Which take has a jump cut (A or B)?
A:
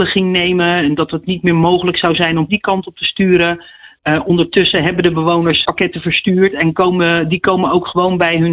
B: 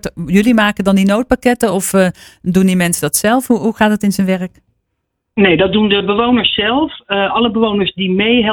A